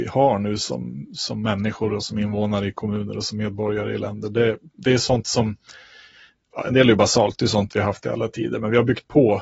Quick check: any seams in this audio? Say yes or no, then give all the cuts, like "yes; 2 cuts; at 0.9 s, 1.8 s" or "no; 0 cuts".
no; 0 cuts